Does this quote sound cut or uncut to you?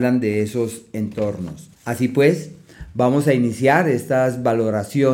cut